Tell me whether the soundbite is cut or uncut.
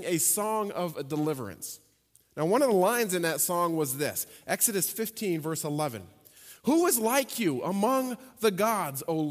uncut